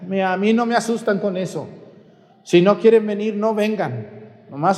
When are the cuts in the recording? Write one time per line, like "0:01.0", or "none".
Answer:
none